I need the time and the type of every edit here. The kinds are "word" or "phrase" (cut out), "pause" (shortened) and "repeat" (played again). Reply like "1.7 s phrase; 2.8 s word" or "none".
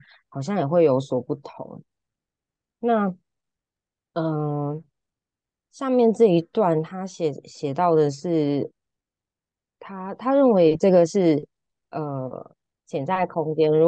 none